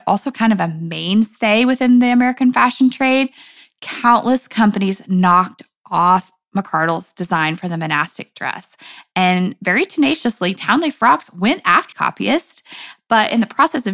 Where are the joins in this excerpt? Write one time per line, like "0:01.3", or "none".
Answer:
0:11.9